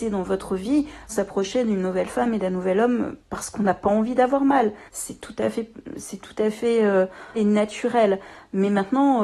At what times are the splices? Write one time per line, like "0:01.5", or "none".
0:01.1
0:03.2
0:04.9
0:07.3